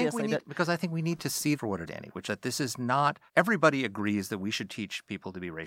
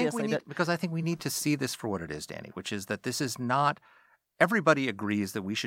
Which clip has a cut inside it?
first; 4 cuts; at 1.5 s, 1.9 s, 2.2 s, 3.3 s

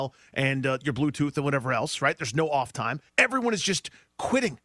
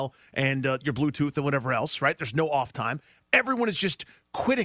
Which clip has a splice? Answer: first; 1 cut; at 3.1 s

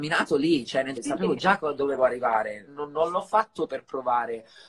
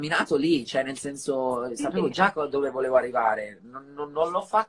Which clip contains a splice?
first; 4 cuts; at 1.0 s, 2.0 s, 2.7 s, 3.7 s

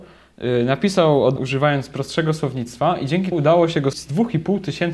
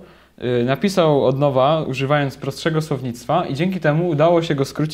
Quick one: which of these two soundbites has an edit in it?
first; 3 cuts; at 1.4 s, 3.3 s, 3.9 s

